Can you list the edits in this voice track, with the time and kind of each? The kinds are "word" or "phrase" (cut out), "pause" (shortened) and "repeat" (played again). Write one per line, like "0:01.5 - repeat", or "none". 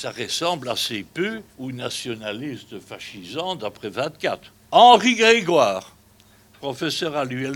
0:01.5 - pause
0:04.6 - pause